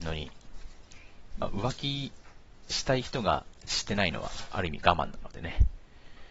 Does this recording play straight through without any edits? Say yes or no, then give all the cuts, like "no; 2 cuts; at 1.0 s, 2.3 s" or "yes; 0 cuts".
no; 1 cut; at 1.3 s